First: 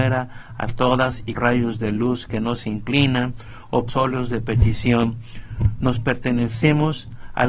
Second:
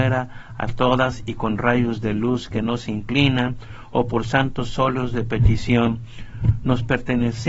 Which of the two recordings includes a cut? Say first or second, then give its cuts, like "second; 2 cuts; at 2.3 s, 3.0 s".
first; 2 cuts; at 1.4 s, 3.9 s